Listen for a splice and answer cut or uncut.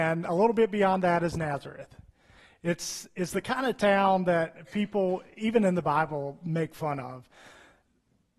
uncut